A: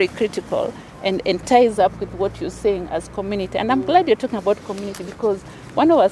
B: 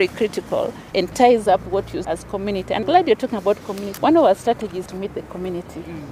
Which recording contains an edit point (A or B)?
B